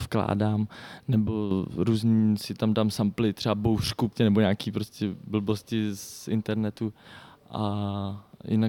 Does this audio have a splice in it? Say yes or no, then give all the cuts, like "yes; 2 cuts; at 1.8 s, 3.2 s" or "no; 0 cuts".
no; 0 cuts